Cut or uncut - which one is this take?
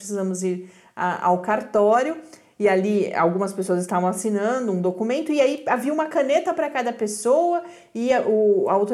uncut